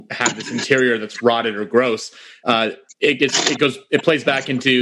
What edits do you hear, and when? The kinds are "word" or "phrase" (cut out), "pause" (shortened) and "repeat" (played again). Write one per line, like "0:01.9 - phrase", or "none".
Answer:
none